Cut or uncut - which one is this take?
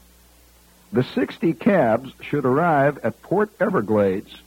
uncut